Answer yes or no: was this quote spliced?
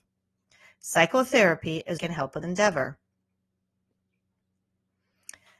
yes